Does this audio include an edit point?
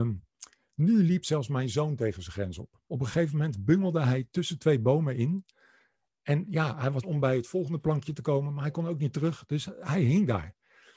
yes; 2 cuts; at 2.8 s, 7.0 s

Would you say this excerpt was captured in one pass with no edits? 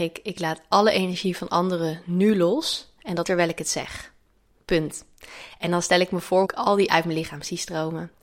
no; 3 cuts; at 3.2 s, 6.4 s, 6.9 s

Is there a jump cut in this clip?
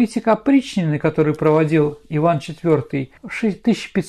yes; 1 cut; at 3.2 s

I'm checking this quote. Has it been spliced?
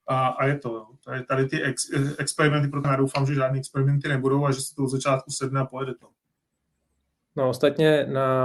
yes; 1 cut; at 2.8 s

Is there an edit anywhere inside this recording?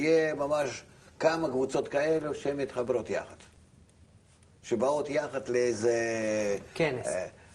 no; 0 cuts

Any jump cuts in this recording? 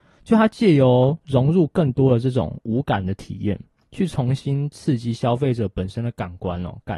no; 0 cuts

